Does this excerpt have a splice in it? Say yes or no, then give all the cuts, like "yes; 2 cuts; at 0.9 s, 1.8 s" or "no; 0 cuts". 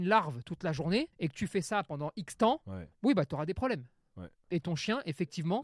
yes; 2 cuts; at 1.1 s, 2.9 s